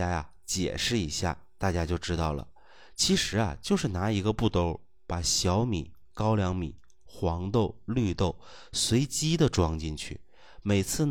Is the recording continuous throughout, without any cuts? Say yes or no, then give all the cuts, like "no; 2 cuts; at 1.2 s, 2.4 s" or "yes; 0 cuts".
no; 1 cut; at 6.1 s